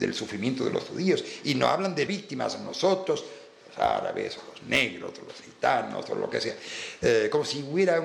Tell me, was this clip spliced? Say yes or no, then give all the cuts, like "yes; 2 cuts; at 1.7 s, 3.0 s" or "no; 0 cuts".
yes; 1 cut; at 2.1 s